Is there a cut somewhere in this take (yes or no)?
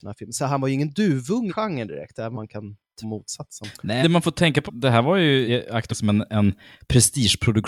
yes